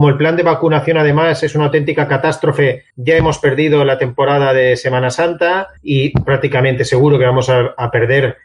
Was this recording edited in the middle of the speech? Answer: yes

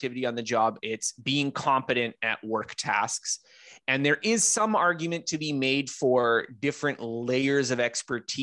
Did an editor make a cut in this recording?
no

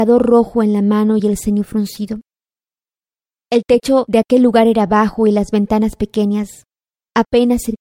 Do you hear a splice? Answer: no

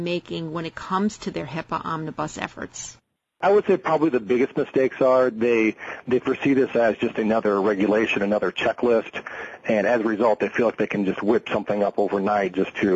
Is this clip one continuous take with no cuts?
yes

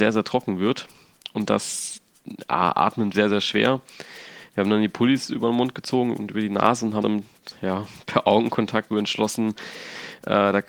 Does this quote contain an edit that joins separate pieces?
yes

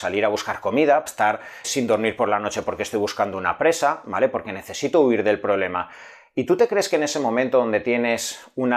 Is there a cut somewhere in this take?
yes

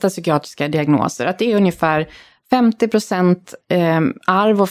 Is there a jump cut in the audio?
no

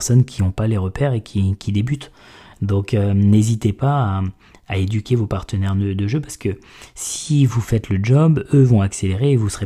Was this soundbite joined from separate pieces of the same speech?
no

